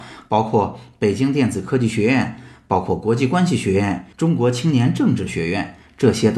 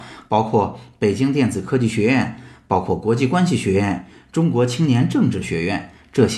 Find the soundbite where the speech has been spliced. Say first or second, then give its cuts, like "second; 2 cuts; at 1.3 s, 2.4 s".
first; 1 cut; at 4.1 s